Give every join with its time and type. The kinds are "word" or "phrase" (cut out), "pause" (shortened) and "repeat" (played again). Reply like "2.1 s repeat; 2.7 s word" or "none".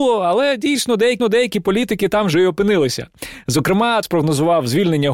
1.2 s repeat; 4.0 s word